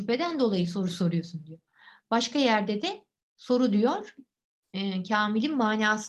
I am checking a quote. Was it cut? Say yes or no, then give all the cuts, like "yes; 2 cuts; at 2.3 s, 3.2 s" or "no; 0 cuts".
no; 0 cuts